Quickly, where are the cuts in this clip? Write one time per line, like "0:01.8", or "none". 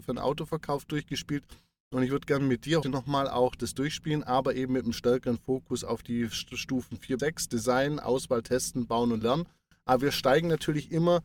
0:02.8
0:07.2